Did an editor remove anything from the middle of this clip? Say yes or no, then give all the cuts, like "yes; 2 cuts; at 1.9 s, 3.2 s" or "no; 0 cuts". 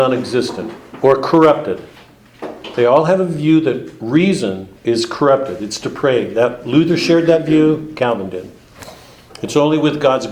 yes; 1 cut; at 4.8 s